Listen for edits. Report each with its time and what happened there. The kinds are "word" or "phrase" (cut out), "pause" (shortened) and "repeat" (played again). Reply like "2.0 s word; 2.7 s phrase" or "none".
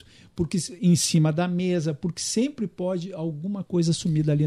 none